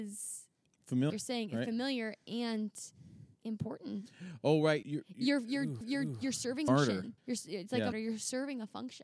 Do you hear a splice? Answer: yes; 7 cuts; at 1.1 s, 3.3 s, 4.8 s, 5.8 s, 6.7 s, 7.2 s, 7.9 s

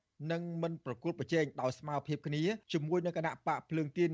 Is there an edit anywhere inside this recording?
yes; 1 cut; at 2.6 s

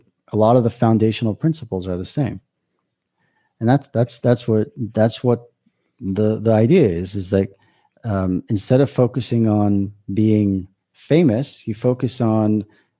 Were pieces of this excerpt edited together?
no; 0 cuts

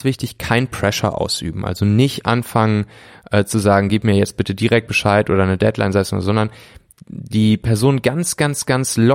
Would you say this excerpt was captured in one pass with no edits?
yes; 0 cuts

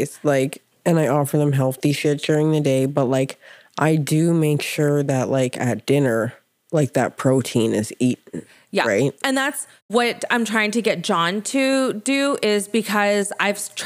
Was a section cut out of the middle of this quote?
no; 0 cuts

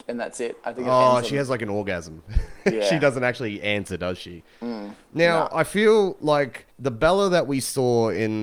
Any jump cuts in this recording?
yes; 1 cut; at 6.7 s

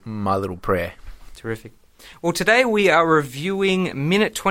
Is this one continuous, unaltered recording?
yes; 0 cuts

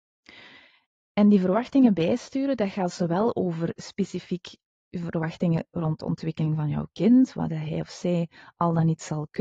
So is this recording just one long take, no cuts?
yes; 0 cuts

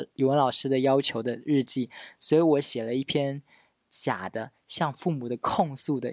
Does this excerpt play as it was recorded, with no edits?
yes; 0 cuts

